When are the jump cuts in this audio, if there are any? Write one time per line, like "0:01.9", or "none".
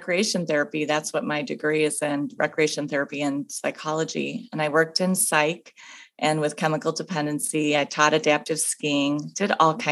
none